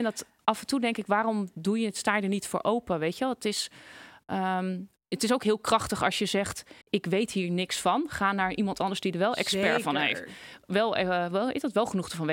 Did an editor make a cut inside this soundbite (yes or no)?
yes